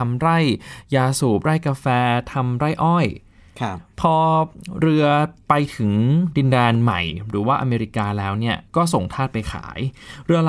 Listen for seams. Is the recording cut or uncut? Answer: cut